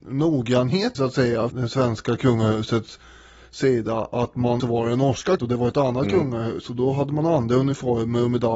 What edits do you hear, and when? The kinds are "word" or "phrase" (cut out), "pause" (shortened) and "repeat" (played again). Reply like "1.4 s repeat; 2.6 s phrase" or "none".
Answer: 0.9 s word; 1.5 s word; 4.6 s word; 5.4 s word

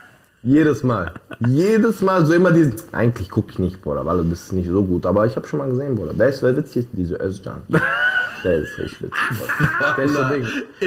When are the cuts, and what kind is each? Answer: none

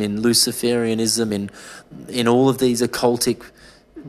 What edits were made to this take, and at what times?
none

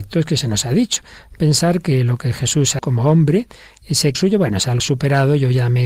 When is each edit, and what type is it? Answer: 2.8 s word; 4.1 s word; 4.8 s word

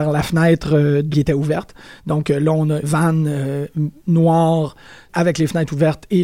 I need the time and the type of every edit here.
1.1 s word; 2.8 s word; 5.1 s word

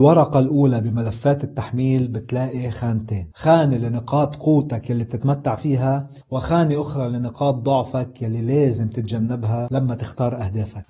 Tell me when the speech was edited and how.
6.2 s pause

